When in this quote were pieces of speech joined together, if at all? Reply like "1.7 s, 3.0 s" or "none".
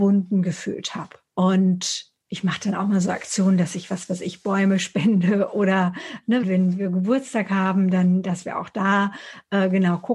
1.2 s, 6.4 s